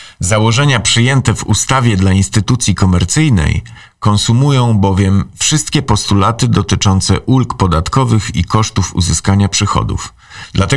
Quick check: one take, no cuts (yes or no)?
yes